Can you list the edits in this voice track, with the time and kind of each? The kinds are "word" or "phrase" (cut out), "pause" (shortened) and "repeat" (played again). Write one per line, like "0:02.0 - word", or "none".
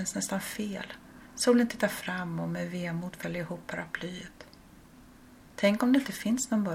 none

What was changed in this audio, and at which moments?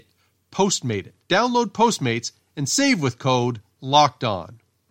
0:01.2 - pause

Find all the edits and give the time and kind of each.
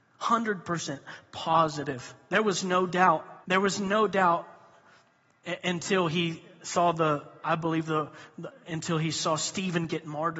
0:03.4 - pause
0:07.4 - word

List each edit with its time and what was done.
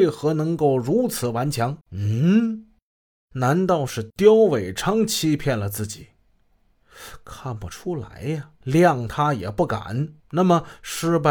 0:01.8 - pause
0:08.6 - pause
0:10.2 - pause

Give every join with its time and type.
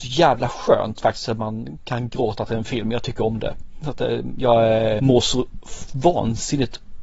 0:05.0 - word

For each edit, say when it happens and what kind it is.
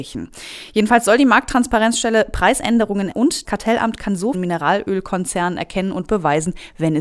0:03.1 - word
0:03.4 - word
0:04.3 - phrase

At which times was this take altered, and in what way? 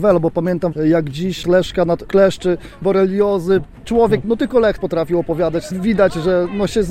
0:01.4 - word
0:02.0 - word
0:02.8 - word
0:03.8 - word
0:04.2 - word
0:04.8 - word

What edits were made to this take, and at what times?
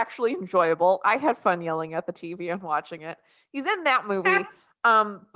none

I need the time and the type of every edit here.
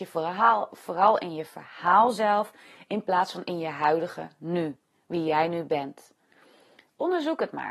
0:04.9 - pause

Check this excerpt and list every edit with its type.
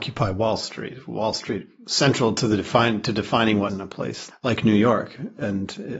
0:03.7 - word
0:04.3 - word

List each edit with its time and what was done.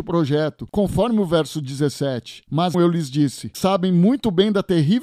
0:02.7 - word
0:03.5 - word

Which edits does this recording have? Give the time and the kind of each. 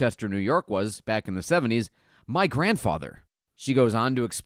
none

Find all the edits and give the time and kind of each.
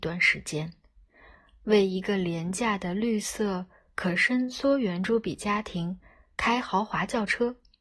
none

